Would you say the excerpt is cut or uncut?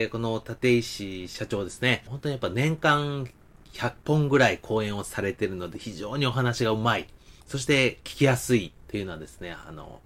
cut